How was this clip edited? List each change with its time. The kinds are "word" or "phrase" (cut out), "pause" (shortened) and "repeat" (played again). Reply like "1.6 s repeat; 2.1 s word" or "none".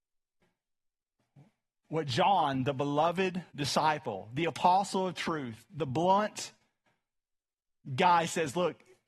3.5 s pause